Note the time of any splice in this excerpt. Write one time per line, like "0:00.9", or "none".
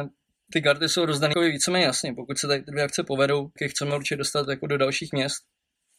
0:01.3
0:03.6